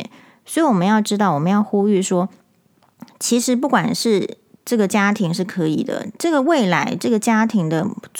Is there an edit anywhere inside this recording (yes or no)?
no